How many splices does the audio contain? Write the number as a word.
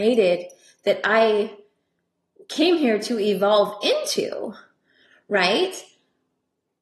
zero